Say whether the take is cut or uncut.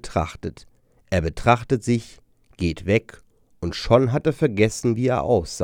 uncut